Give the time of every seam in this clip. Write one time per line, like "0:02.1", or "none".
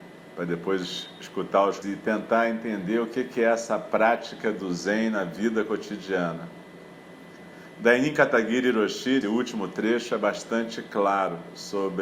0:01.8
0:09.2